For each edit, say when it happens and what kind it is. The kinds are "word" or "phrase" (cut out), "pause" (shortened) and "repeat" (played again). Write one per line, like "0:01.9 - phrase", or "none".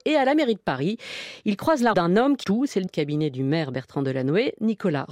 0:01.9 - word
0:02.4 - word
0:02.9 - word

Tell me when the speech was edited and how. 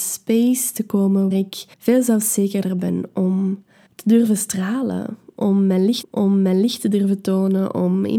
0:01.3 - word
0:01.7 - pause
0:03.9 - pause
0:06.0 - repeat

